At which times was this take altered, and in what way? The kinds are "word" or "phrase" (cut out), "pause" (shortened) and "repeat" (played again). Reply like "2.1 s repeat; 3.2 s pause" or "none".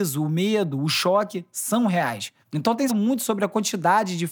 2.4 s pause; 2.9 s phrase